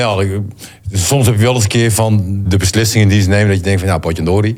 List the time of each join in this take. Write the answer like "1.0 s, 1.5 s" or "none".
2.4 s